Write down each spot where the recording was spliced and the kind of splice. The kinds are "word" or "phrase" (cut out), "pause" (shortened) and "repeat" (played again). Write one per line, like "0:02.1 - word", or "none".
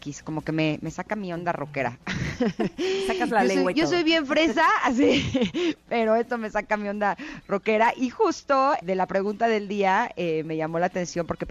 0:08.8 - word